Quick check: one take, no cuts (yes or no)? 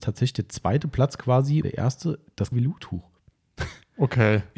no